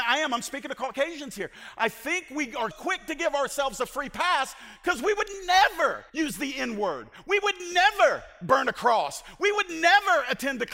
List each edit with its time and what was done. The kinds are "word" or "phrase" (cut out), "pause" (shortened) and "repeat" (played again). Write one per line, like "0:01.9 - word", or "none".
0:02.7 - word
0:06.1 - pause

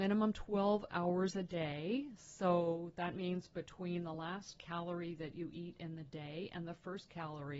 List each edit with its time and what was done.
none

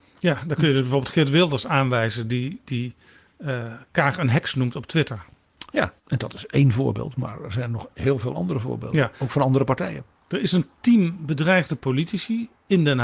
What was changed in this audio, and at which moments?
0:06.0 - pause

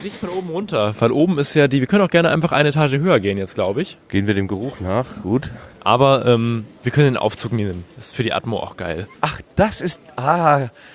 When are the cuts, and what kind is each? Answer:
0:04.0 - pause
0:05.7 - pause
0:09.1 - pause

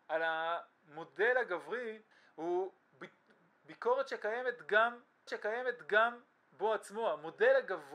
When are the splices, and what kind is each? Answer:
0:02.1 - pause
0:05.3 - repeat

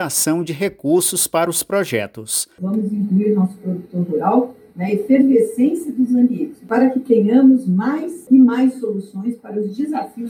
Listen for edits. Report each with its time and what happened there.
none

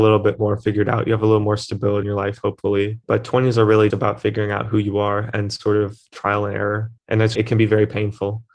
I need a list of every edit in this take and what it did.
0:02.0 - word
0:03.0 - pause
0:03.9 - word
0:07.0 - pause
0:07.3 - word

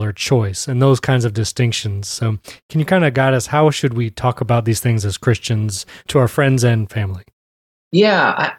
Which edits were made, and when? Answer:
none

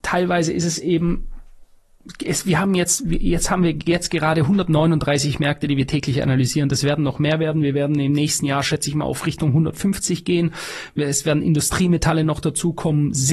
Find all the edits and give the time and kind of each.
none

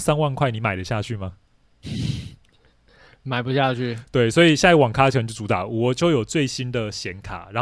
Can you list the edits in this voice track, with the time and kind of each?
none

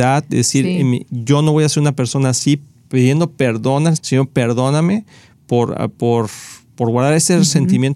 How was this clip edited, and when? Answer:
0:04.0 - word

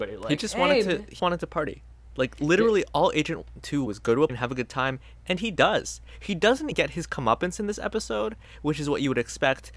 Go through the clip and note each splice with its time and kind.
0:01.2 - word
0:03.9 - phrase
0:04.3 - word
0:06.7 - word

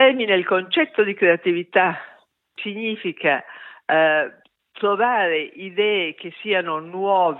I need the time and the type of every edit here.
0:02.6 - word
0:04.4 - pause

